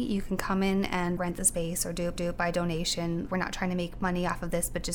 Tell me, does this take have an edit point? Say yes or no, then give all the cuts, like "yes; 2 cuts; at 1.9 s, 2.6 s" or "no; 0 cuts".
yes; 3 cuts; at 1.2 s, 2.2 s, 3.3 s